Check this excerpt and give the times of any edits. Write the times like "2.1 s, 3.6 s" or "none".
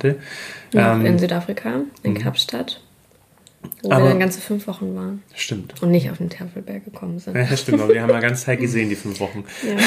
5.3 s